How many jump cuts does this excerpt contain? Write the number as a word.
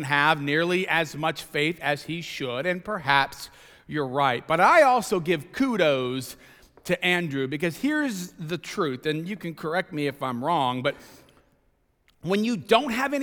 zero